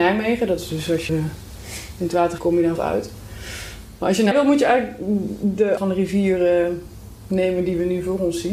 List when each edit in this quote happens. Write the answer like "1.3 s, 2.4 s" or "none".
1.1 s, 2.4 s, 2.7 s, 4.3 s, 5.8 s